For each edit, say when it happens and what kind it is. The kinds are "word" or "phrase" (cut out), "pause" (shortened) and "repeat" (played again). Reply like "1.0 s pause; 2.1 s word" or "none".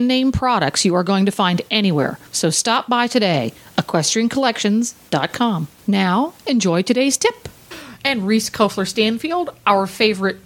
2.3 s pause; 5.8 s pause